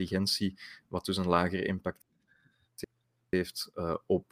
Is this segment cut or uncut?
uncut